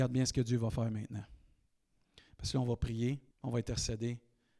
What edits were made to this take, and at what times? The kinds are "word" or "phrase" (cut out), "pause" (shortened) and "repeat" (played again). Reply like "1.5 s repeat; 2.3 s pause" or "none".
3.3 s pause